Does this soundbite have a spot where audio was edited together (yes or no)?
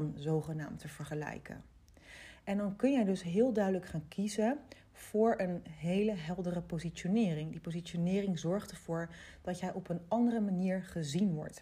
no